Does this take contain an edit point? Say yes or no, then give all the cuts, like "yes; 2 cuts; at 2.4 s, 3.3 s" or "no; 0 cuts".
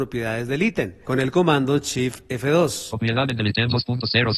no; 0 cuts